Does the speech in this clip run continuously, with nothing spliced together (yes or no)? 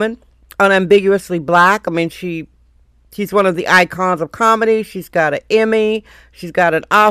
yes